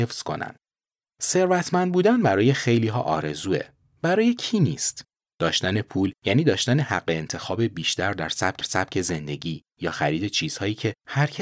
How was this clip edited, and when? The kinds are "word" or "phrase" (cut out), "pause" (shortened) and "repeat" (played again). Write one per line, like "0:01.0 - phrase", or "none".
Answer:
0:08.6 - repeat